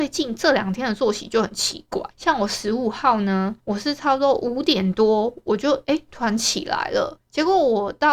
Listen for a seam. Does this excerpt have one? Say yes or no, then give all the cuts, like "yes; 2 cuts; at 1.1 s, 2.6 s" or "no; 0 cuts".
yes; 3 cuts; at 2.1 s, 3.6 s, 7.2 s